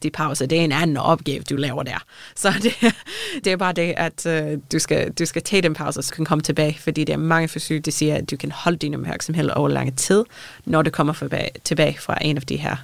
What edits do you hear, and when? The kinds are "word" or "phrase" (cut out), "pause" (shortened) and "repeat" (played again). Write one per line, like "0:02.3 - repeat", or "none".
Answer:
0:03.4 - word
0:06.1 - word